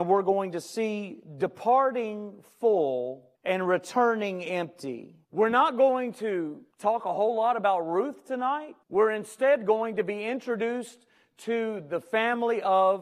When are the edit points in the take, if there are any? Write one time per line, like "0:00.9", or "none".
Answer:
0:03.3
0:05.2
0:06.7
0:08.8